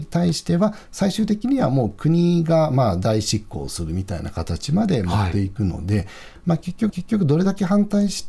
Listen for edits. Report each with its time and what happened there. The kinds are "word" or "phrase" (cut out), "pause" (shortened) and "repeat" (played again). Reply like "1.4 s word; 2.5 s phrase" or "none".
6.9 s repeat

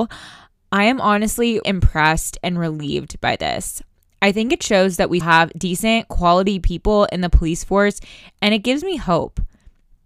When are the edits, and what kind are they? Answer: 1.6 s word; 5.2 s word

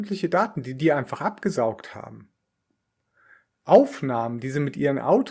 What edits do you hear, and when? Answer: none

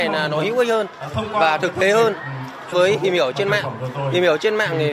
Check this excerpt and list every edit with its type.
2.7 s word

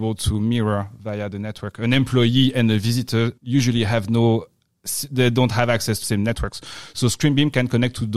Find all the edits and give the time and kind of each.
3.4 s pause; 6.0 s word

